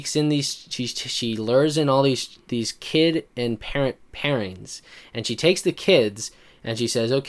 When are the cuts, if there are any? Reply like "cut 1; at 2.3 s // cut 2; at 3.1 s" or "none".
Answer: none